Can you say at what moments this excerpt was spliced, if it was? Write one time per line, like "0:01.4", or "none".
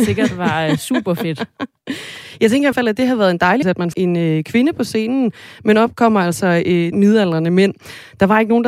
0:02.7
0:03.6
0:03.9
0:06.9